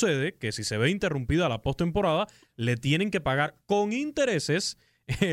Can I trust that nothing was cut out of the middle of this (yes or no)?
yes